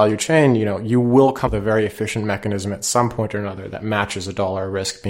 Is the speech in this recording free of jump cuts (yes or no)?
no